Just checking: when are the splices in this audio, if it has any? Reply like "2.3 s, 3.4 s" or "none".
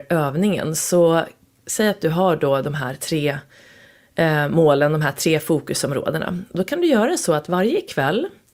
none